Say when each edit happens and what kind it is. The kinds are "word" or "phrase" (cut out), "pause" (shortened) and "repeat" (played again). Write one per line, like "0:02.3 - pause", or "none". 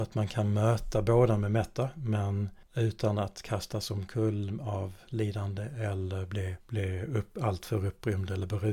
0:02.6 - pause
0:06.6 - pause